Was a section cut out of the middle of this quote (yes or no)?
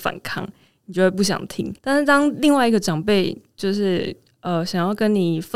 yes